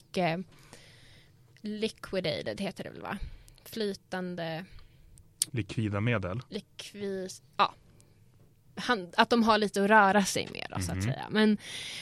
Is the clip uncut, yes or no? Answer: no